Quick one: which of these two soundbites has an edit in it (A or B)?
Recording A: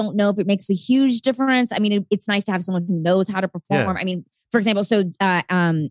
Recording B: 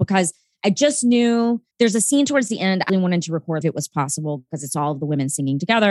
B